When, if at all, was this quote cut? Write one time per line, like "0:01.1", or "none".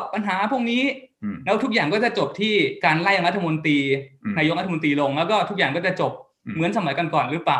none